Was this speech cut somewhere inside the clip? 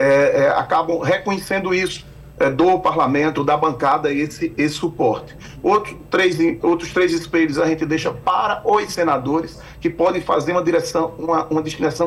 no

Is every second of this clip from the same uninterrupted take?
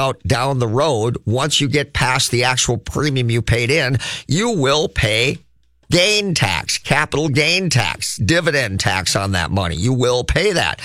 yes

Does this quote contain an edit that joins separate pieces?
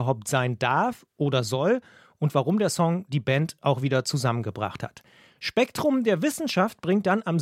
no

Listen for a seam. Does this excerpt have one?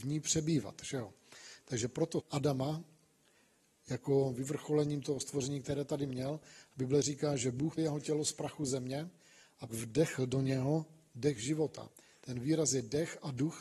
yes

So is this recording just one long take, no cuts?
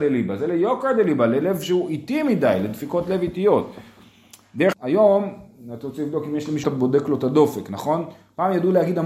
no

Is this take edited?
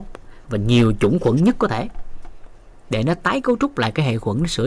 no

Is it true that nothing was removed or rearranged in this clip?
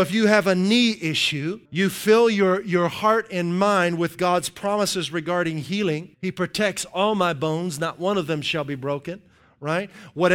no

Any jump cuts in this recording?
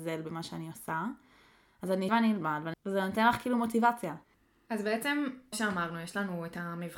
yes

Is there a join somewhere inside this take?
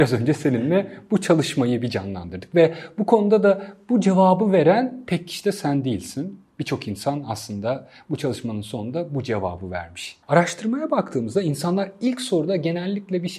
yes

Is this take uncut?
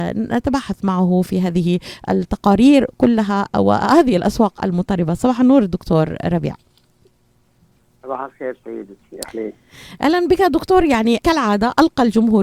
yes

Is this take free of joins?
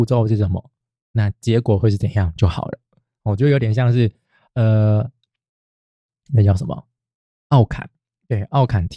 yes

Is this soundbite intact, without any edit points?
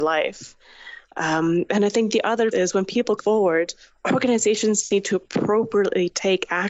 no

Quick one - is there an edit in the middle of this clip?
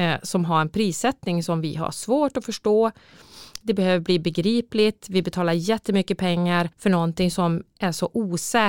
yes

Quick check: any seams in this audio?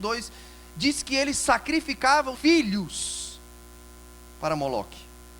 yes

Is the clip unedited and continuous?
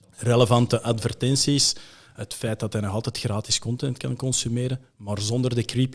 yes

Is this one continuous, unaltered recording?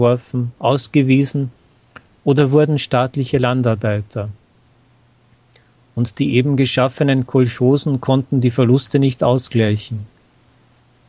yes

